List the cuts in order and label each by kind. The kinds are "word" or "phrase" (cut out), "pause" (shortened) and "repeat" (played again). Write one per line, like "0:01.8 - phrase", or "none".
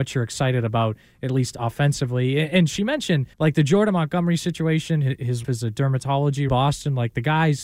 0:03.3 - pause
0:05.4 - word
0:06.5 - phrase